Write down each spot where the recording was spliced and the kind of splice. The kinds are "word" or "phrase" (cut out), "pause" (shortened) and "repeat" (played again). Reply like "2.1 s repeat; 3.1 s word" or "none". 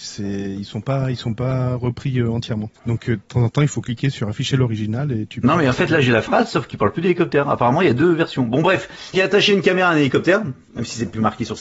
2.8 s pause; 9.1 s word